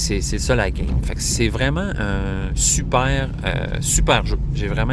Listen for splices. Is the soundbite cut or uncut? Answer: uncut